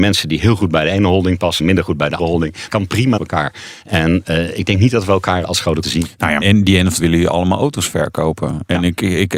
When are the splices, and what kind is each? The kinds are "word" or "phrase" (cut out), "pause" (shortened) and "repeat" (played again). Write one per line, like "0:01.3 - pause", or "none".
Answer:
0:01.6 - word
0:02.2 - word
0:02.7 - word
0:03.2 - word
0:05.4 - word
0:05.8 - word
0:06.4 - word
0:07.0 - word